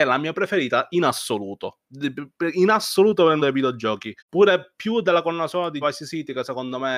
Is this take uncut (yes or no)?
no